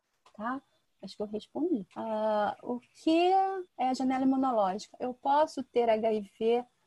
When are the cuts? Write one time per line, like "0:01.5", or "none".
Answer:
0:01.9
0:03.7

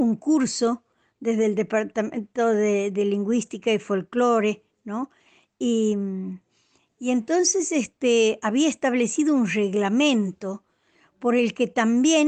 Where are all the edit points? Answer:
none

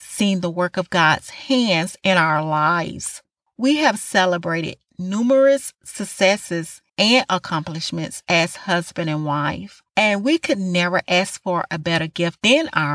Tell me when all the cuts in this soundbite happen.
0:03.5
0:06.9
0:09.9

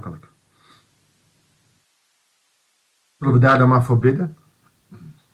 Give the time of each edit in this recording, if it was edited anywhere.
none

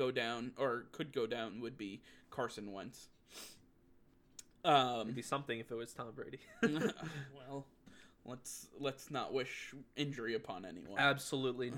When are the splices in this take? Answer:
none

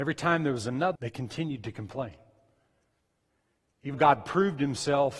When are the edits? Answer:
0:01.0
0:03.9

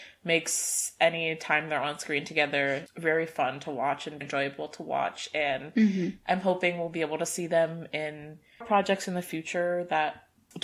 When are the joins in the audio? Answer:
0:02.9
0:04.2
0:08.6

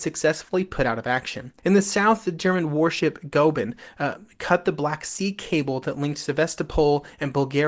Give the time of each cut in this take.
0:01.6

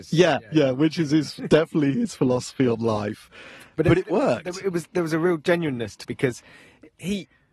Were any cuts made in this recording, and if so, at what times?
0:06.0

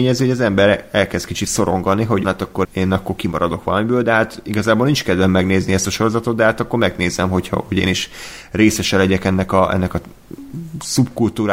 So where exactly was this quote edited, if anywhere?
0:02.2
0:02.6

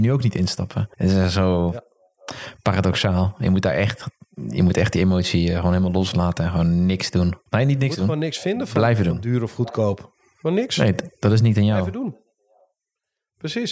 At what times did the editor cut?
0:00.9
0:07.5

